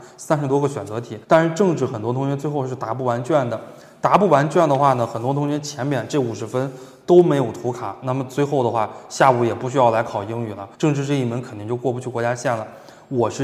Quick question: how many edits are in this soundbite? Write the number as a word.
two